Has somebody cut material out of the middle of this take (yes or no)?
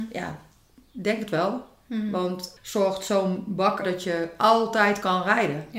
yes